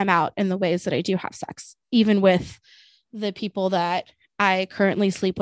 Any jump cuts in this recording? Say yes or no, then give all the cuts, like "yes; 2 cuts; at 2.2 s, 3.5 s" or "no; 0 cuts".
no; 0 cuts